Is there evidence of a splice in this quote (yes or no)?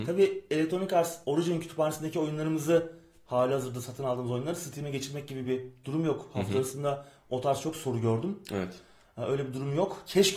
no